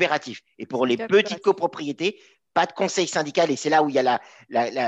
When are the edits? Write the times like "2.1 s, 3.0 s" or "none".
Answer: none